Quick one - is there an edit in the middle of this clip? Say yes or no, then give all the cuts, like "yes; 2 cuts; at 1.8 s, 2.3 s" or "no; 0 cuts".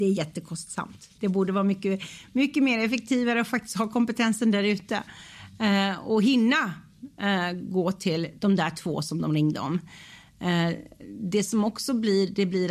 no; 0 cuts